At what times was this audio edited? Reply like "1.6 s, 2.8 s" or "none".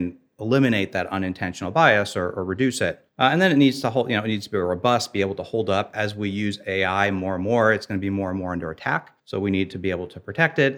3.1 s, 9.2 s